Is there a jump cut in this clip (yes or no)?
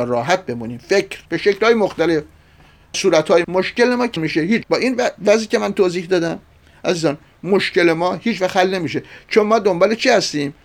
yes